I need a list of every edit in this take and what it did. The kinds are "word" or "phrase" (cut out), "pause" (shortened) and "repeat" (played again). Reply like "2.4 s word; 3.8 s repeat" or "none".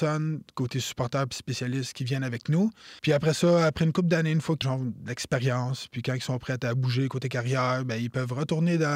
3.0 s pause; 4.6 s phrase